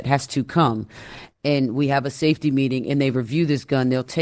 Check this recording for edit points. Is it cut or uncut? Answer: uncut